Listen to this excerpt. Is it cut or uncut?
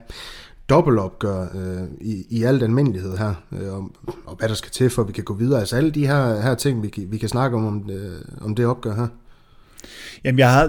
uncut